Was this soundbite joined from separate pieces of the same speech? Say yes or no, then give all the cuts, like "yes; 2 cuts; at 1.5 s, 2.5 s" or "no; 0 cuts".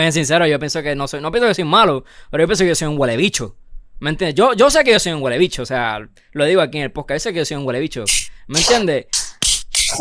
no; 0 cuts